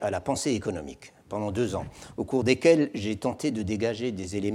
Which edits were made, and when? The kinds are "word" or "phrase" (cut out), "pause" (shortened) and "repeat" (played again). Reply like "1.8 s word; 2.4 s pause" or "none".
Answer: none